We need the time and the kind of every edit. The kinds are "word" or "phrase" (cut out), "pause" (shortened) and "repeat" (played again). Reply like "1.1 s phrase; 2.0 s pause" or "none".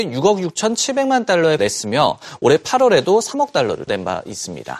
1.6 s word; 3.9 s word